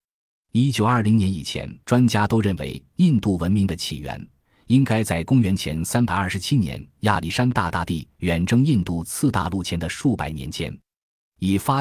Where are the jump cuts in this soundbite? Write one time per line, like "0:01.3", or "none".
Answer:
0:01.8